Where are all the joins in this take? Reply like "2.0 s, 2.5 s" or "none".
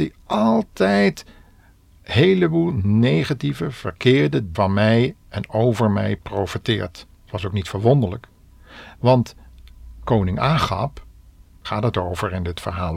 4.5 s, 7.1 s, 11.6 s